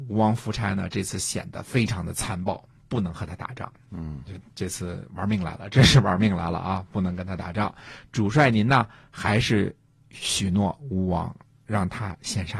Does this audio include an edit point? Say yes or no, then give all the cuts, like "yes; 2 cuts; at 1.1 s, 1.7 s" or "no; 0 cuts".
no; 0 cuts